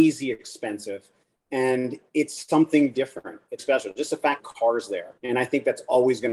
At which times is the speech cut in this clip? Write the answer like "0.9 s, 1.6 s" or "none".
2.9 s, 3.6 s, 4.4 s, 5.2 s